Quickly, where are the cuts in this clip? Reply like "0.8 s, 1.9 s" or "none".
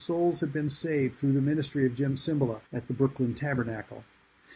2.7 s